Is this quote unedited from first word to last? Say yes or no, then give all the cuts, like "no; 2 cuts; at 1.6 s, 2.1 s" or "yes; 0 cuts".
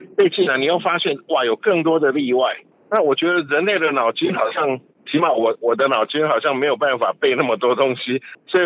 yes; 0 cuts